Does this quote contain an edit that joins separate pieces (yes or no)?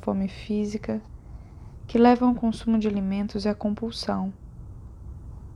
no